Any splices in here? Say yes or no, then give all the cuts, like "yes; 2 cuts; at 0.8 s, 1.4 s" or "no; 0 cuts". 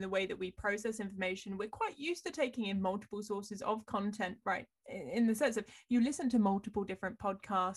no; 0 cuts